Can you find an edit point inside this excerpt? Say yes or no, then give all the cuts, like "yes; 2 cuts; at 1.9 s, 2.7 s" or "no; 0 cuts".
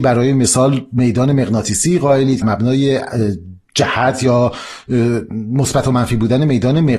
yes; 1 cut; at 2.4 s